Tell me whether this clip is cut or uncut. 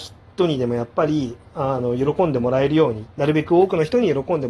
cut